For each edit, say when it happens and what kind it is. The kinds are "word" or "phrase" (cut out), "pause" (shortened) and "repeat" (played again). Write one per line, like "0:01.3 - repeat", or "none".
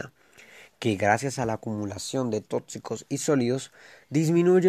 none